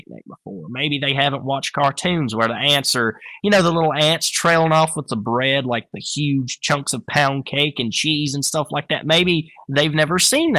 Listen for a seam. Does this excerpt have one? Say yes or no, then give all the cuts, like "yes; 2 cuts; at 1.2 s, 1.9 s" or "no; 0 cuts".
no; 0 cuts